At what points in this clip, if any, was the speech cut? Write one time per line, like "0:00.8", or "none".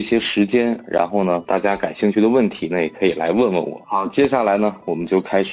none